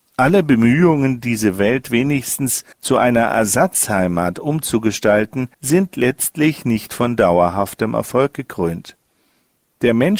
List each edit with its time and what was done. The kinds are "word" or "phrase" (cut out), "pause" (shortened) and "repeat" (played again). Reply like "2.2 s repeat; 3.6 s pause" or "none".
2.7 s pause; 5.5 s pause